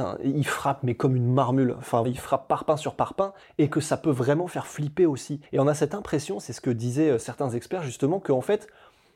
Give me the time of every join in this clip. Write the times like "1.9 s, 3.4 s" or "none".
2.0 s, 3.4 s, 5.5 s